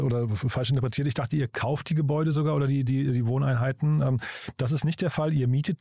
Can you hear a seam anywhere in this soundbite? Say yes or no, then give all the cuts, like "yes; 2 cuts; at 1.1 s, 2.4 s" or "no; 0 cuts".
no; 0 cuts